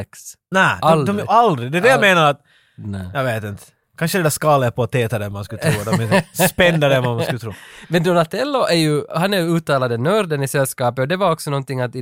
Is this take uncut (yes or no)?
yes